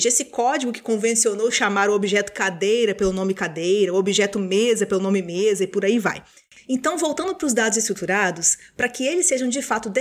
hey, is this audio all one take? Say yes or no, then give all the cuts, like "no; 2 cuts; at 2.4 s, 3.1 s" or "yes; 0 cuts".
yes; 0 cuts